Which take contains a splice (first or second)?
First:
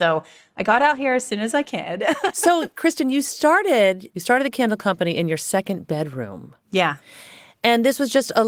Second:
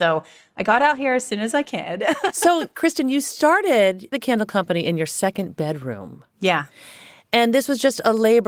second